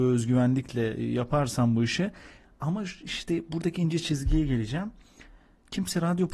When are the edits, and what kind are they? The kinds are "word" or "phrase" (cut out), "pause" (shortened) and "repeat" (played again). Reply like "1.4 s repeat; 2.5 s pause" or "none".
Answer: none